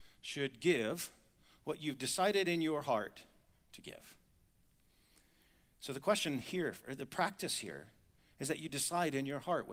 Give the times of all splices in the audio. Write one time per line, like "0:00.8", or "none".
none